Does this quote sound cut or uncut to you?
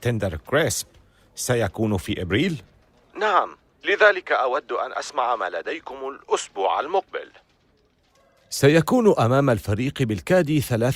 uncut